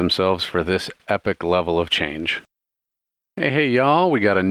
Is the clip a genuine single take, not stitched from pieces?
yes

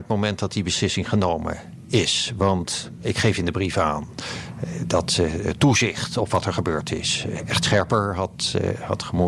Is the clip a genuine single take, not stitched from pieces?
yes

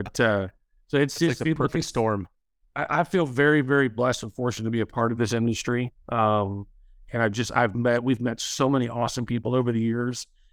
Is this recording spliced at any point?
no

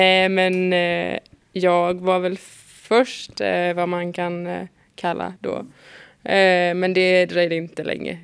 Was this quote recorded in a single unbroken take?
no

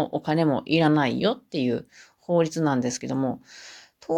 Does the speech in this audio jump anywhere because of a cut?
no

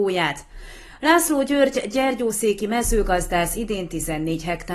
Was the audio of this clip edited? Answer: no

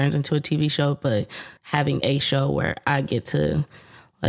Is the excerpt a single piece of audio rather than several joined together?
no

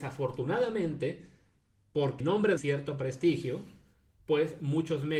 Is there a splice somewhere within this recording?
yes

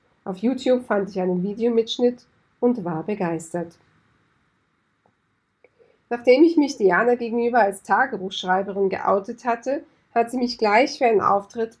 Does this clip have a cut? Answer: no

